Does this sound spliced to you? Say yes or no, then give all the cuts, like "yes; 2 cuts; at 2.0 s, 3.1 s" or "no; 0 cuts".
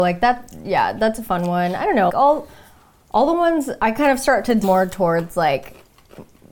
yes; 2 cuts; at 2.1 s, 4.6 s